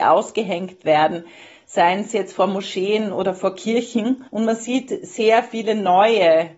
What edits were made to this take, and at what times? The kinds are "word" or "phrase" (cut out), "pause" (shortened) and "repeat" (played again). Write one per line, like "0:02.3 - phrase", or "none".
0:04.3 - pause